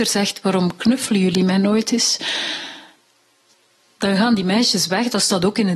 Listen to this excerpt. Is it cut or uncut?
uncut